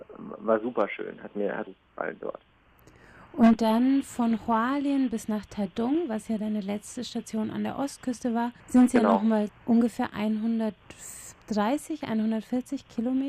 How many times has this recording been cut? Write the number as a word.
three